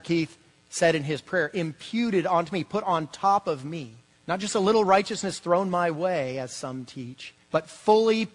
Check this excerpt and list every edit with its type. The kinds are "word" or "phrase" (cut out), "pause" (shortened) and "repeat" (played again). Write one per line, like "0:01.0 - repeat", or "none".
0:04.1 - pause
0:07.4 - pause

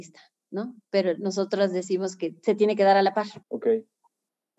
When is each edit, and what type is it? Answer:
0:03.4 - pause

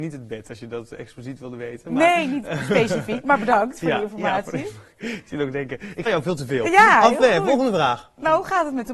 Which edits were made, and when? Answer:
0:06.1 - word

